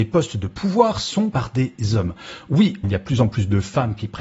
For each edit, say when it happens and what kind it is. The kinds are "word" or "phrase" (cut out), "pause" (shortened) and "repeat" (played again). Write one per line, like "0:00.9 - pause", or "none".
0:01.3 - word
0:02.8 - word